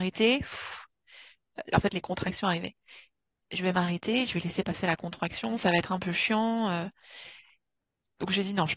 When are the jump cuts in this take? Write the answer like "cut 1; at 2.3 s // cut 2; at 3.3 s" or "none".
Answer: none